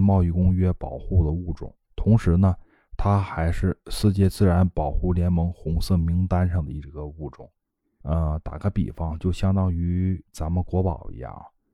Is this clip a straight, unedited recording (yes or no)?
yes